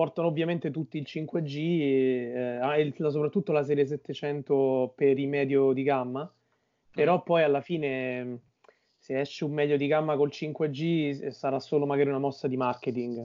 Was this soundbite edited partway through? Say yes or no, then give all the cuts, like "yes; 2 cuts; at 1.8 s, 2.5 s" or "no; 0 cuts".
no; 0 cuts